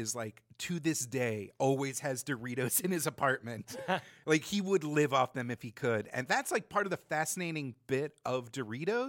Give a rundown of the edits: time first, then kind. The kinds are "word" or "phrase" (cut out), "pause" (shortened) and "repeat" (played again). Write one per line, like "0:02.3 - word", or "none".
none